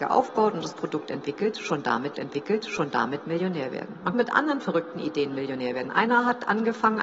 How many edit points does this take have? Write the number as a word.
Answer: two